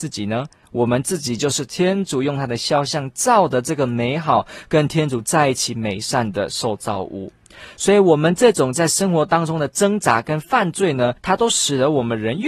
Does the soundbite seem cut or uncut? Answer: cut